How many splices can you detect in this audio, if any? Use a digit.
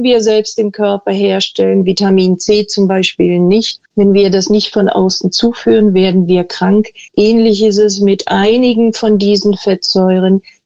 2